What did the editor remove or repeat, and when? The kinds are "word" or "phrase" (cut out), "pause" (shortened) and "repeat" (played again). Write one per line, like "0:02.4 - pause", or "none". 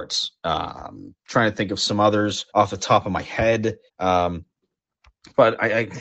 0:02.5 - pause
0:03.9 - pause